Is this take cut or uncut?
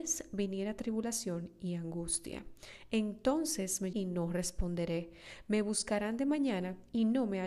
cut